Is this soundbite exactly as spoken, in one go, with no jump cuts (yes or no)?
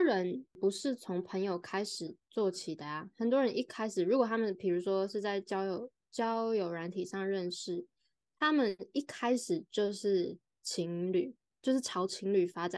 yes